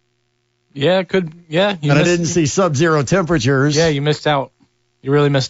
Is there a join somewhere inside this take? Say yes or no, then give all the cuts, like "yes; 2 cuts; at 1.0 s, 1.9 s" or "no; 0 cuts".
no; 0 cuts